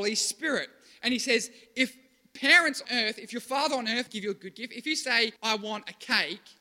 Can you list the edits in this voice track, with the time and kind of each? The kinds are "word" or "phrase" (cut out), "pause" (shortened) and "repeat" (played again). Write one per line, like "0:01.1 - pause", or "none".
0:02.8 - word
0:04.1 - word
0:05.4 - pause